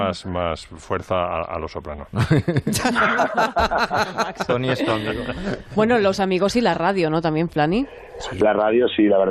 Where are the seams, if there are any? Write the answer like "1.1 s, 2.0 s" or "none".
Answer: none